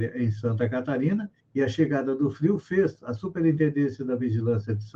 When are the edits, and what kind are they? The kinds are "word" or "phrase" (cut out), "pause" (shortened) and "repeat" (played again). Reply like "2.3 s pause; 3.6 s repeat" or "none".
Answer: 1.4 s pause